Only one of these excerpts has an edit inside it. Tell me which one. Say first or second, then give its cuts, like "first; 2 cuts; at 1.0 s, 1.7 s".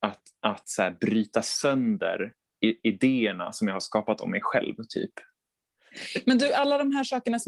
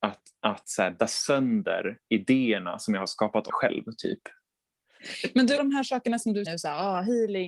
second; 5 cuts; at 1.0 s, 2.1 s, 3.5 s, 5.6 s, 6.4 s